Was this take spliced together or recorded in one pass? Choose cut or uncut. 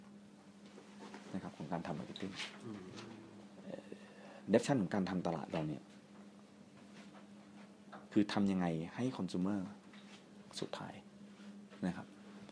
cut